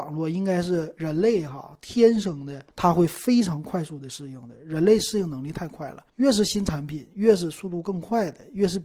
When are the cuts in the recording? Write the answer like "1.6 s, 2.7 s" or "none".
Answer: 2.7 s, 6.1 s